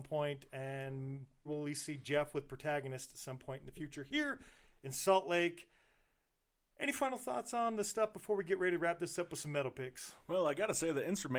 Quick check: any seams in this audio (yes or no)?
yes